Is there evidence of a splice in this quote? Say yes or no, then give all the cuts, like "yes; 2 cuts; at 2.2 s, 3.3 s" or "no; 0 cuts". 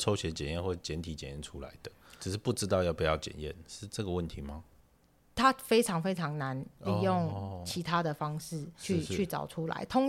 yes; 2 cuts; at 2.2 s, 8.8 s